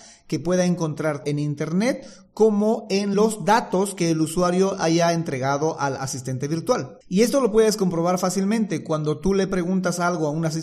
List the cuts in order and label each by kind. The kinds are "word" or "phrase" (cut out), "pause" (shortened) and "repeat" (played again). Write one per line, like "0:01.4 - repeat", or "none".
0:01.2 - word
0:03.1 - phrase
0:07.0 - pause